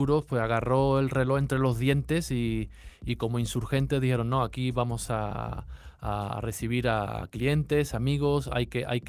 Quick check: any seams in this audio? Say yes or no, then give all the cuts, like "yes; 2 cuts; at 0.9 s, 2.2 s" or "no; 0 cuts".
no; 0 cuts